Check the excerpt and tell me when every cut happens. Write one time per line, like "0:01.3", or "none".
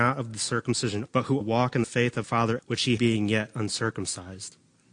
0:01.0
0:01.4
0:01.8
0:02.2
0:02.6
0:03.0